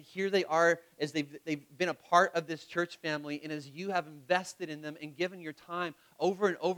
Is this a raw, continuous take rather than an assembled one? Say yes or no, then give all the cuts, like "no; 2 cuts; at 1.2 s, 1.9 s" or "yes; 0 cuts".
yes; 0 cuts